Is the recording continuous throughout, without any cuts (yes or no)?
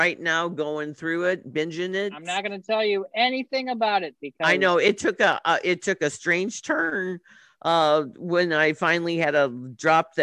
yes